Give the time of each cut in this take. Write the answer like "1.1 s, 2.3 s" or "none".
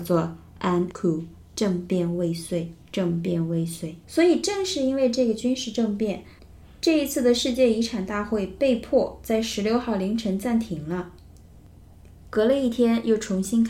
0.9 s, 2.8 s, 4.0 s